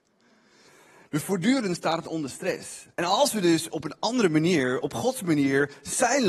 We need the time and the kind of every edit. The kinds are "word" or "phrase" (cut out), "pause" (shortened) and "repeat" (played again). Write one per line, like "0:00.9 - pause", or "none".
0:02.9 - pause

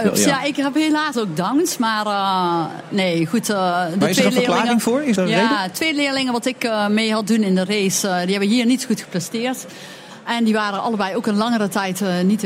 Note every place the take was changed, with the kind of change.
0:01.1 - word
0:05.2 - word

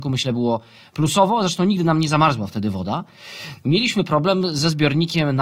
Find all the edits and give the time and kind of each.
none

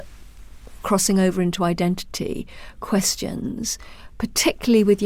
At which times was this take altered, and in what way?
none

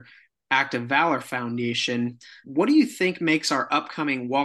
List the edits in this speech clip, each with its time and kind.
0:02.4 - word

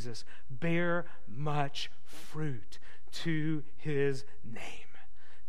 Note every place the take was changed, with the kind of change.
none

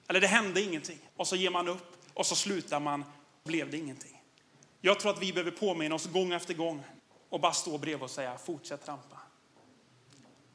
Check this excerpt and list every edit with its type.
0:01.1 - pause
0:03.5 - word
0:07.0 - pause

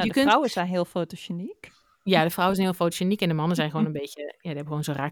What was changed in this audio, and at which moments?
none

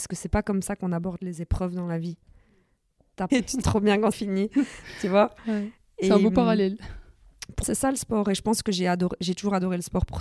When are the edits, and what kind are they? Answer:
0:03.3 - phrase
0:03.6 - word
0:04.1 - word
0:07.6 - word

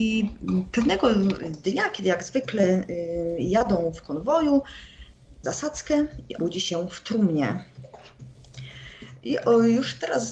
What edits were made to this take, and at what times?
0:05.4 - phrase
0:06.4 - word

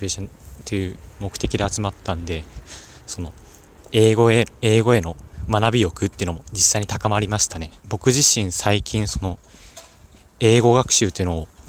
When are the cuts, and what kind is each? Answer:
0:07.8 - pause

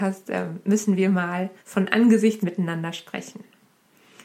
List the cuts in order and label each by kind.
0:01.6 - pause
0:02.4 - phrase

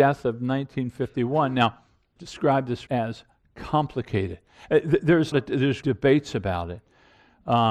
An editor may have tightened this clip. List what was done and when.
0:02.2 - word
0:02.9 - word
0:05.3 - word
0:05.8 - word

